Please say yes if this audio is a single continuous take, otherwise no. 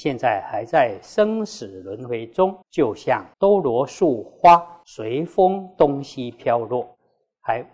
no